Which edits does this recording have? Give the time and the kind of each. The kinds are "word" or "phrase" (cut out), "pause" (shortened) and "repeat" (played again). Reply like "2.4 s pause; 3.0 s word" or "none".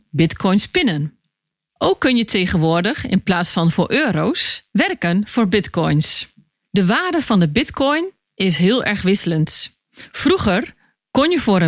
none